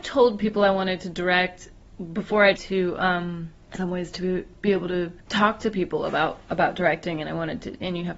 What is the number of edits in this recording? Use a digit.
3